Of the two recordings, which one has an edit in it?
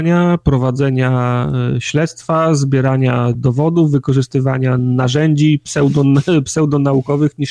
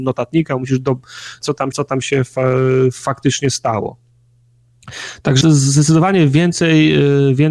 second; 3 cuts; at 1.4 s, 1.7 s, 5.4 s

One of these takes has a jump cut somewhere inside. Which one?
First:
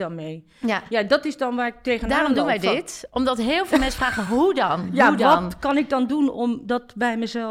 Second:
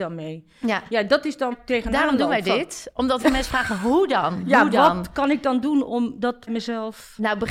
second; 3 cuts; at 1.5 s, 3.2 s, 6.5 s

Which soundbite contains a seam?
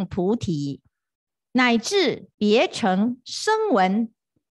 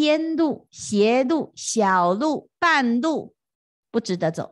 first; 1 cut; at 2.3 s

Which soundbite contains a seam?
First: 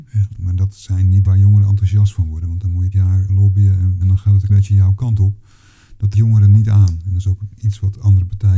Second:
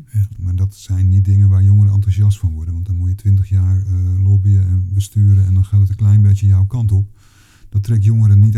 first; 6 cuts; at 1.3 s, 2.9 s, 3.3 s, 4.0 s, 4.5 s, 6.1 s

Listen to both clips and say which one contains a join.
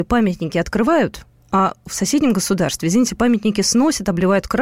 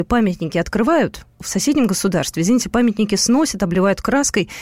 second; 1 cut; at 1.3 s

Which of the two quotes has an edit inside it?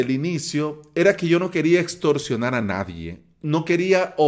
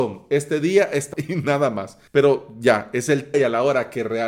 second; 3 cuts; at 1.1 s, 2.1 s, 3.3 s

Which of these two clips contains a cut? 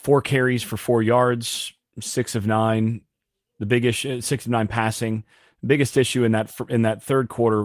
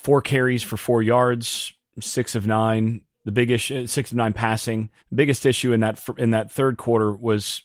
second; 2 cuts; at 3.1 s, 5.0 s

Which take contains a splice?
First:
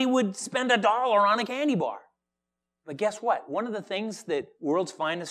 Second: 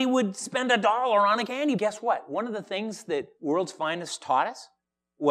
second; 1 cut; at 1.8 s

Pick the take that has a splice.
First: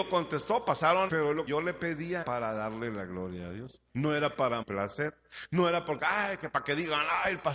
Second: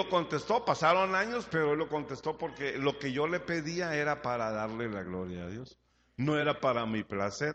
first; 5 cuts; at 1.1 s, 1.5 s, 2.2 s, 3.9 s, 4.6 s

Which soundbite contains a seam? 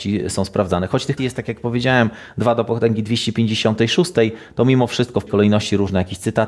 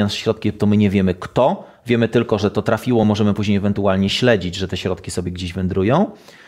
first; 2 cuts; at 1.2 s, 5.3 s

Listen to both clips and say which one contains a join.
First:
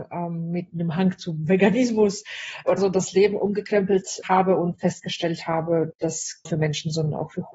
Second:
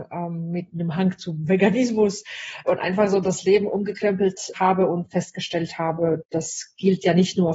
first; 2 cuts; at 2.8 s, 6.5 s

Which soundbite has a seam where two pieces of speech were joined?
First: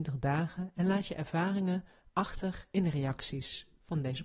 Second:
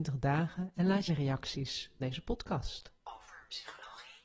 second; 2 cuts; at 1.1 s, 2.0 s

